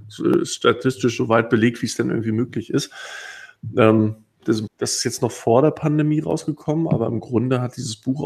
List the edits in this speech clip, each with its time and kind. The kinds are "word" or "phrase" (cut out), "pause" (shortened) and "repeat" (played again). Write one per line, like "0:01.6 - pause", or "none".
0:04.7 - phrase